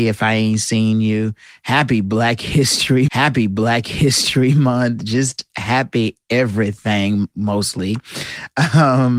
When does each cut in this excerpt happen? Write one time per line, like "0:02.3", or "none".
0:03.1
0:05.5